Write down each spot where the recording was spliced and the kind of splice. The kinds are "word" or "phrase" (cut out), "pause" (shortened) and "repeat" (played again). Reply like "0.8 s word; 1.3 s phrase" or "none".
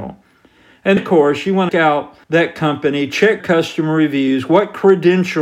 1.0 s word; 1.7 s phrase; 2.2 s pause; 3.4 s word